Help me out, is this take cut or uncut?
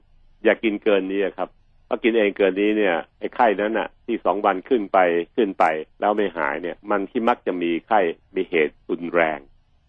cut